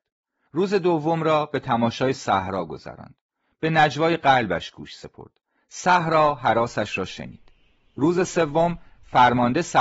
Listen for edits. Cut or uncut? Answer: uncut